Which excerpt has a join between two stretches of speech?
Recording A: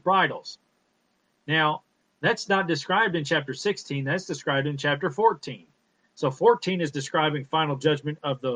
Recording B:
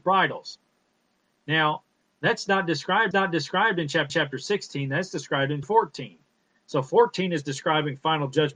B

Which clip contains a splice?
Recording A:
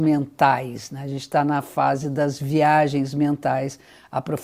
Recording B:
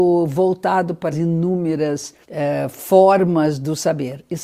B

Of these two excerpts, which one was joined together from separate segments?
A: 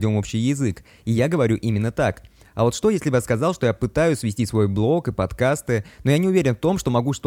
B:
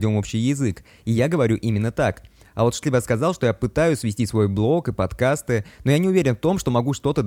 B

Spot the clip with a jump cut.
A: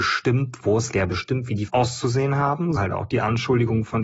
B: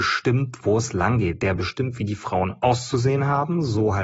A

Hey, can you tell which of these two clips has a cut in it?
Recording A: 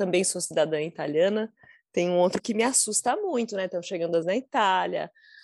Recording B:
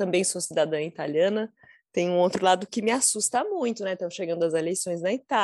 A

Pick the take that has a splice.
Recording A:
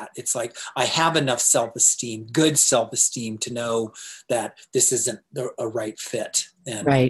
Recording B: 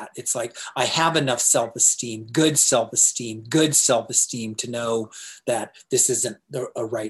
B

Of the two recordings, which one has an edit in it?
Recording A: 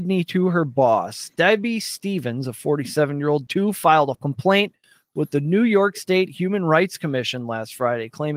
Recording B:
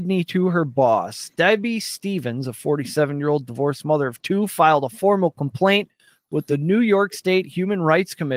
A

